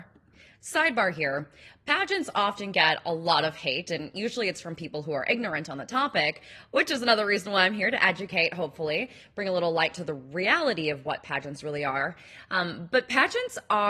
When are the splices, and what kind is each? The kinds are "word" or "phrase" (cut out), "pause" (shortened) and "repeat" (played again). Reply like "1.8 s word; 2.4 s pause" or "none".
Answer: none